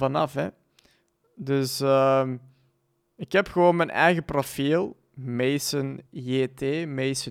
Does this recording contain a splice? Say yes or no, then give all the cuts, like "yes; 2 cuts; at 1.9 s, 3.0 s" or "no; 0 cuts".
yes; 1 cut; at 6.1 s